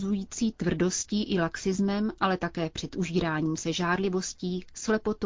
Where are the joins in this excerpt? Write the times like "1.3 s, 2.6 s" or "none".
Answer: none